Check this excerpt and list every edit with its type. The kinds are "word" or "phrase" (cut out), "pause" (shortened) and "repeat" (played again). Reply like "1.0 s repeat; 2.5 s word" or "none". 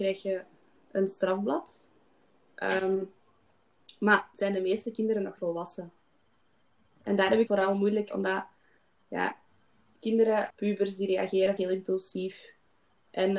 4.3 s word; 5.4 s word; 7.5 s word; 8.1 s word; 10.5 s word; 11.6 s word